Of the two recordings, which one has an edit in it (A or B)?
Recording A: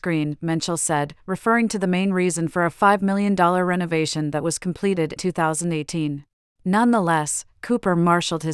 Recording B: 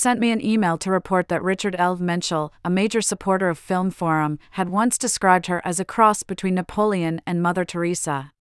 A